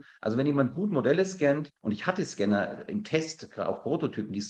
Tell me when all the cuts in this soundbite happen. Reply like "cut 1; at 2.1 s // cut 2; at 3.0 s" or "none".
cut 1; at 1.8 s

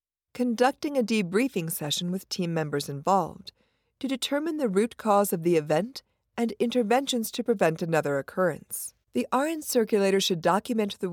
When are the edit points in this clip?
cut 1; at 9.0 s

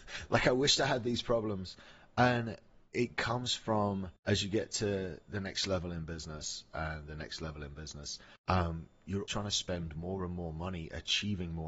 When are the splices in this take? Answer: cut 1; at 4.2 s // cut 2; at 8.4 s // cut 3; at 9.3 s

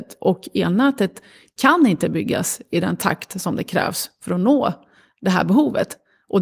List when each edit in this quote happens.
none

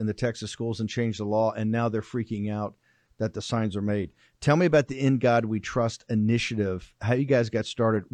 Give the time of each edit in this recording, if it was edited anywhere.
none

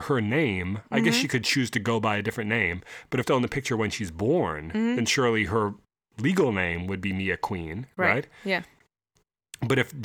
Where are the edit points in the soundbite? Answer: cut 1; at 3.2 s

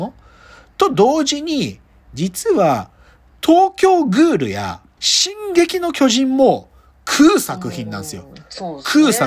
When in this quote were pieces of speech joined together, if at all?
cut 1; at 5.0 s

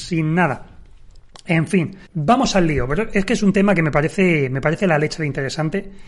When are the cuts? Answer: cut 1; at 2.1 s

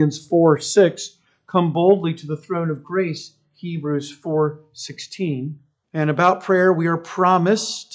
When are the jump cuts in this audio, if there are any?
cut 1; at 5.8 s

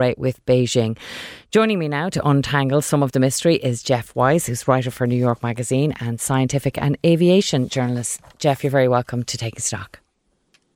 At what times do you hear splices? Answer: none

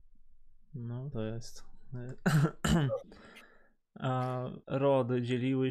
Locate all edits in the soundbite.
cut 1; at 1.1 s // cut 2; at 4.6 s

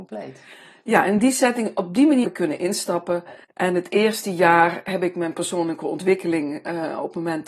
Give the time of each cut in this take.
cut 1; at 2.2 s // cut 2; at 3.4 s

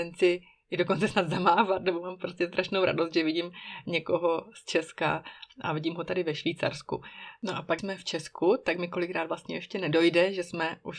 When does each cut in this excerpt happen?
cut 1; at 7.8 s

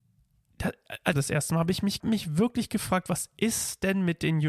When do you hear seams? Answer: cut 1; at 1.1 s // cut 2; at 2.0 s

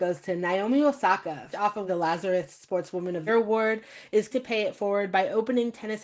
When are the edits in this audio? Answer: cut 1; at 1.5 s // cut 2; at 1.9 s // cut 3; at 3.3 s // cut 4; at 4.3 s

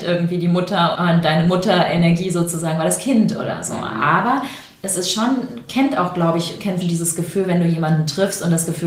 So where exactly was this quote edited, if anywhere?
cut 1; at 0.9 s // cut 2; at 6.8 s

